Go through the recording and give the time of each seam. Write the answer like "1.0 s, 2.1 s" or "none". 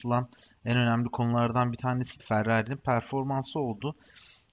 2.2 s